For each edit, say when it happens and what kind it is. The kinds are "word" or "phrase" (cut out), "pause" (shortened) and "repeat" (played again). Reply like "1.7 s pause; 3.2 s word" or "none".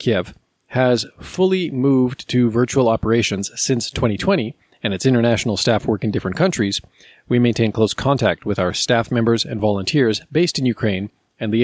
none